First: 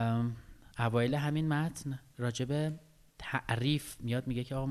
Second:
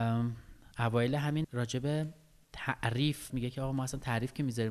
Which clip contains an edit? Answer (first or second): second